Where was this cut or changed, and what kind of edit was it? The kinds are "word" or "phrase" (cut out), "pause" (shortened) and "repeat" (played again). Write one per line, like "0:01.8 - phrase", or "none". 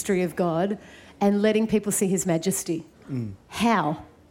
0:02.9 - pause